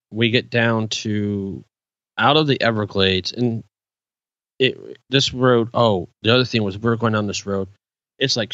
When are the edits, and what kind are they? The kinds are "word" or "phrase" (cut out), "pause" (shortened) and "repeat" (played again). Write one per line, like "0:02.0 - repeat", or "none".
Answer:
none